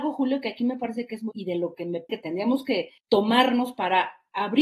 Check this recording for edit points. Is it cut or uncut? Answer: cut